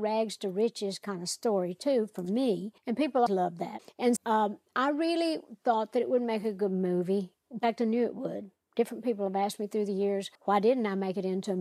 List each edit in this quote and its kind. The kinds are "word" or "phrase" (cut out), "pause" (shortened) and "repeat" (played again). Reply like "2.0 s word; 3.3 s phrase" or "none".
2.8 s pause; 3.3 s word; 4.2 s word; 10.3 s pause